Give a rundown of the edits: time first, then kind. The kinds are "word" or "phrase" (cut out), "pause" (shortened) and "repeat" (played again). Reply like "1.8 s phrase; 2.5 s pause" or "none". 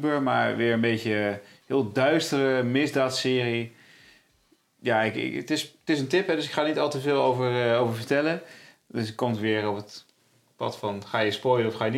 none